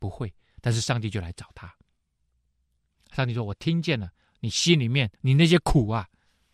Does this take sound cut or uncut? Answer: cut